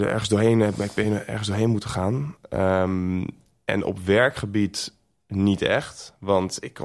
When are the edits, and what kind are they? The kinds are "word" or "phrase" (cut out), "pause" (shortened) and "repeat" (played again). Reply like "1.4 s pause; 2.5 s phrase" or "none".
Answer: none